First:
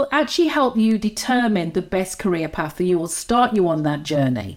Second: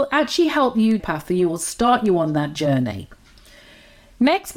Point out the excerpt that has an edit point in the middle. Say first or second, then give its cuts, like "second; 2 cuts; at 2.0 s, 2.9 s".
second; 1 cut; at 1.0 s